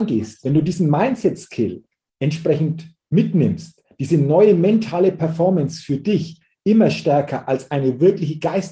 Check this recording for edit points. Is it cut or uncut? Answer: uncut